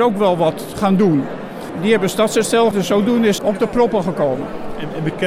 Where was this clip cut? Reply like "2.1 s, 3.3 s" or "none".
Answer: 2.7 s, 3.4 s